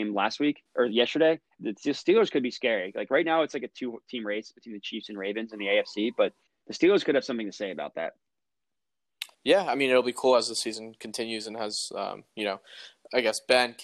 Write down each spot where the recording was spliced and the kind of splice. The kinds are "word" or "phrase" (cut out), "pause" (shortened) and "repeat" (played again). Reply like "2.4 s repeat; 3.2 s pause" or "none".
1.6 s word; 6.5 s pause; 9.3 s pause